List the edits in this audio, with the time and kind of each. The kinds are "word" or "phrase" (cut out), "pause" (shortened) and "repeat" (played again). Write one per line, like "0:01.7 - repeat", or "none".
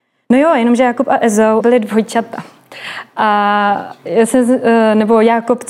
0:01.6 - word

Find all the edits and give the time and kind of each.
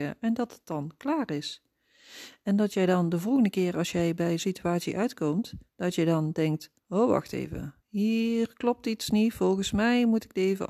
0:04.4 - word
0:05.7 - pause
0:06.8 - pause
0:07.8 - pause

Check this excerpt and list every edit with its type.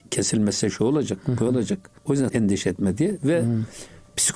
0:02.0 - pause
0:02.3 - word

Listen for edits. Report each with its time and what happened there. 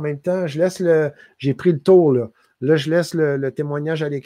none

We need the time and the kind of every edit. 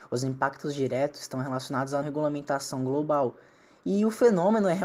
0:02.0 - word

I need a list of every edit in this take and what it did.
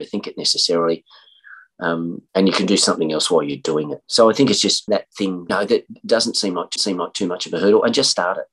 0:02.3 - pause
0:04.9 - word
0:05.5 - phrase
0:06.8 - repeat

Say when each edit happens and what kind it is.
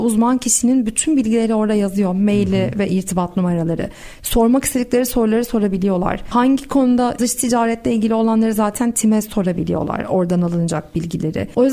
0:07.2 - word

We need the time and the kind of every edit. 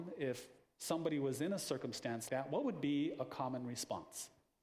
0:02.3 - word

